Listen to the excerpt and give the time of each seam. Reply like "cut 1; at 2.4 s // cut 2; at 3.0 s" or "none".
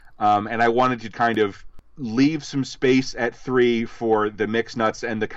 cut 1; at 1.1 s